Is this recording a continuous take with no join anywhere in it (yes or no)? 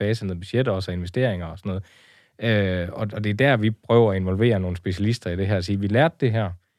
yes